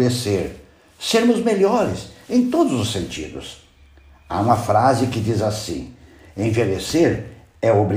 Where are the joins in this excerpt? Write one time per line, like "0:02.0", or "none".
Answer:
none

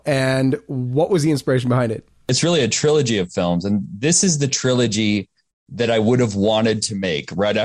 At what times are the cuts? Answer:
none

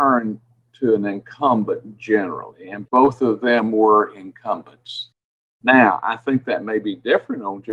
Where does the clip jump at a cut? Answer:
none

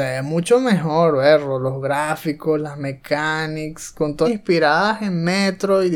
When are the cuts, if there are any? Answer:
0:04.2

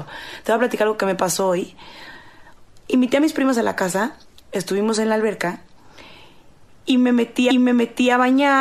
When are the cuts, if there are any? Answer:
0:07.5

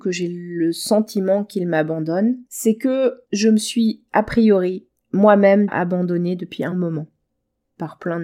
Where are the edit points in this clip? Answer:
0:02.5
0:03.2
0:04.1
0:05.7
0:06.7

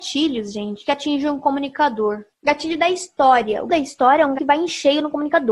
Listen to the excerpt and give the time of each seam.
0:02.3
0:03.7
0:04.4

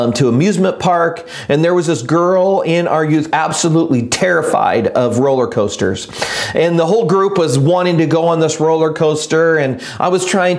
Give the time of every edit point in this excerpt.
0:03.3

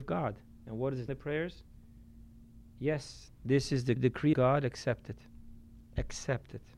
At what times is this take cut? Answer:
0:01.1
0:04.0
0:04.3

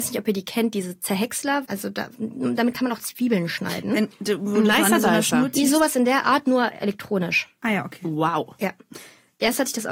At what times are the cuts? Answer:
0:01.7

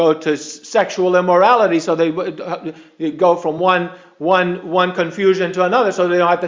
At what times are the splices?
none

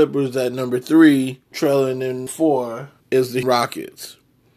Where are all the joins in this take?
0:01.5
0:02.3
0:03.0
0:03.4

